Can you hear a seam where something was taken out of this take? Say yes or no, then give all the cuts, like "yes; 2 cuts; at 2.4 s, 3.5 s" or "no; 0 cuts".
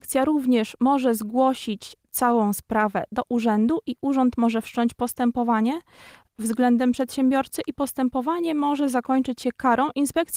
no; 0 cuts